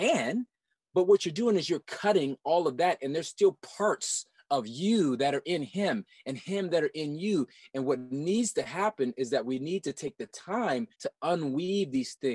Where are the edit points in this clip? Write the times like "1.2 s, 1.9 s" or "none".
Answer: 10.9 s

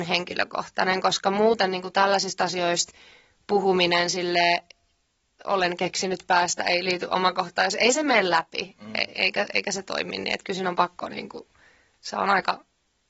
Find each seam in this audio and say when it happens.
none

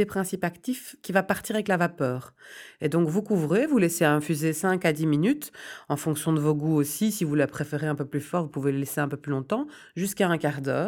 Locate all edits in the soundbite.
none

